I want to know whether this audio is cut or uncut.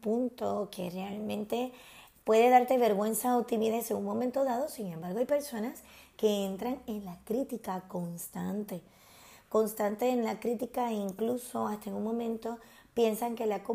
uncut